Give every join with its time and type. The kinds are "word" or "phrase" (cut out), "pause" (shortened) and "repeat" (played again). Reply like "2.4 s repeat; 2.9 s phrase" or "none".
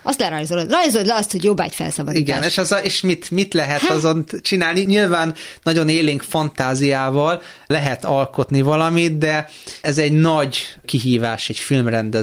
none